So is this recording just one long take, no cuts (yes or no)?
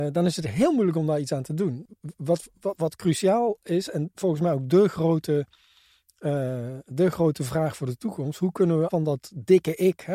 no